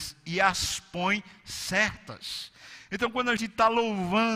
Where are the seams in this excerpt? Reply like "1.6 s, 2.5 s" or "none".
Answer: 3.4 s